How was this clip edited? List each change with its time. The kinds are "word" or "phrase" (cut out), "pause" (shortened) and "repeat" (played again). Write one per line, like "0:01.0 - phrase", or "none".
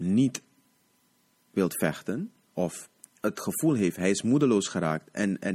0:03.0 - pause